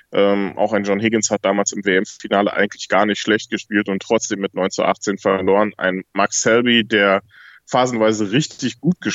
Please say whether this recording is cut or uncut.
uncut